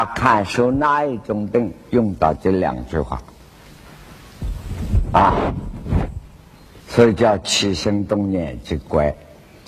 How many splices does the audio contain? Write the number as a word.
one